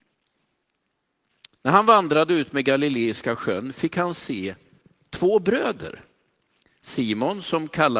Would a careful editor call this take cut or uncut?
uncut